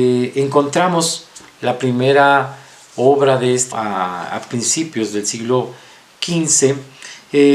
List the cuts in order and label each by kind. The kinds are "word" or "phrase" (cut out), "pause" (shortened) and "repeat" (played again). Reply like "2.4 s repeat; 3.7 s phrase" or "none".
3.7 s word